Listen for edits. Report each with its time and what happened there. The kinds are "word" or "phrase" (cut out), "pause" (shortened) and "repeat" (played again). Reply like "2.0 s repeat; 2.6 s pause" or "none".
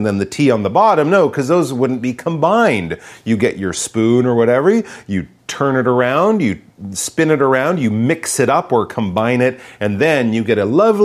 none